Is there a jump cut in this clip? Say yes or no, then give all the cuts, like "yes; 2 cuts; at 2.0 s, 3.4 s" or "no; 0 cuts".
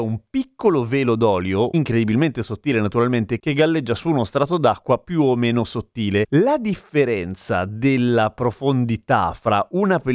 no; 0 cuts